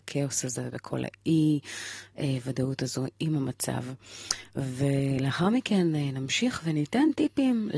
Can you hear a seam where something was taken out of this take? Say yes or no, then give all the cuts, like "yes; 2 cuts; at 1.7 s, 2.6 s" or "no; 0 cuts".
no; 0 cuts